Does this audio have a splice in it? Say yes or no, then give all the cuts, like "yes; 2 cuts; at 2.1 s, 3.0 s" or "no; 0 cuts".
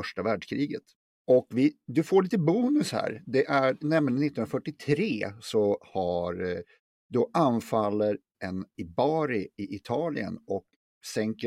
yes; 2 cuts; at 8.3 s, 8.7 s